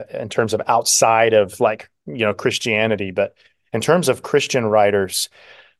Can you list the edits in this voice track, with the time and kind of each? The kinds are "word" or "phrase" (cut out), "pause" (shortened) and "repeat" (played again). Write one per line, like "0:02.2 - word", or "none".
none